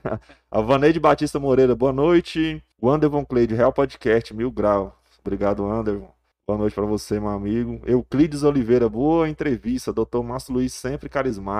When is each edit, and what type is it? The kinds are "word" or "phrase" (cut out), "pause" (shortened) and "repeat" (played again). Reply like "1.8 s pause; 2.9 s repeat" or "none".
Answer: 2.7 s pause; 6.3 s pause